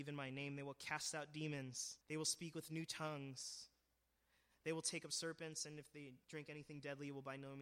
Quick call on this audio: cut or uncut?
cut